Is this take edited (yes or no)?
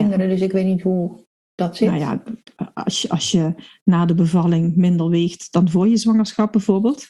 no